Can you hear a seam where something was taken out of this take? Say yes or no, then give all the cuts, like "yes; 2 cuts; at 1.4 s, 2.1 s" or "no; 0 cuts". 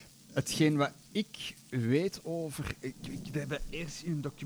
no; 0 cuts